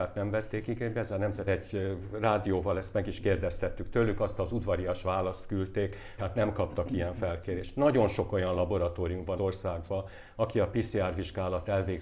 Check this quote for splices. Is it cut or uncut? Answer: cut